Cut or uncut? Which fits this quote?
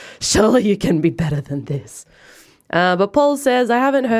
uncut